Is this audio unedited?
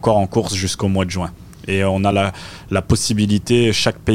yes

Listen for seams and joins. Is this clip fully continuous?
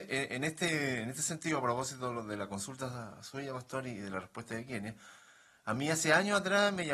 yes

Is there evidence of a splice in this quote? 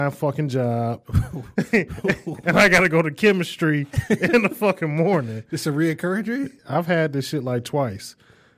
yes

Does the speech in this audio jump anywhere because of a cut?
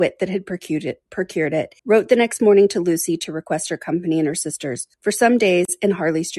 yes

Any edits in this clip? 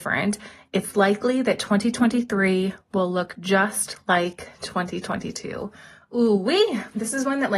no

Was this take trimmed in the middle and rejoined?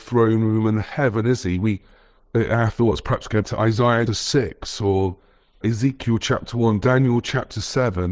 yes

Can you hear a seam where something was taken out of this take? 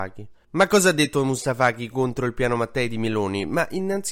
no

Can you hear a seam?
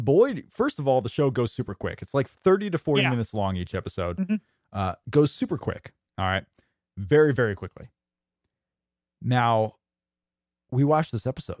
no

